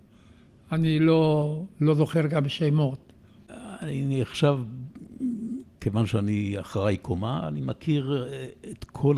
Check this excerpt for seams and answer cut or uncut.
uncut